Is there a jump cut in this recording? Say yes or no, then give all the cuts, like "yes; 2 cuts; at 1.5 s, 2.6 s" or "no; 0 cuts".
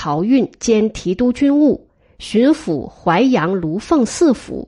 no; 0 cuts